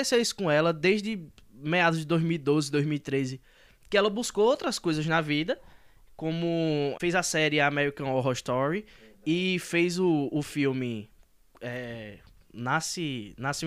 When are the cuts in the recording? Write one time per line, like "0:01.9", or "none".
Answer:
none